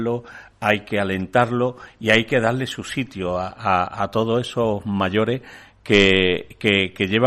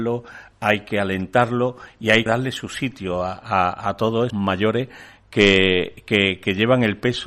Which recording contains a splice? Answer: second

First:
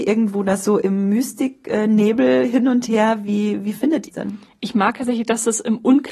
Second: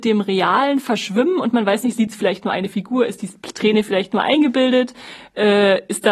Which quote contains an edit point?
first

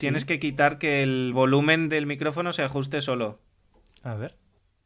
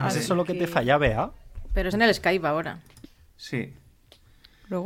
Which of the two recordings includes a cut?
second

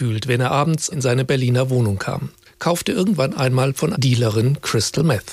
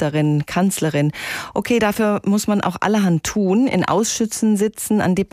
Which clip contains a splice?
first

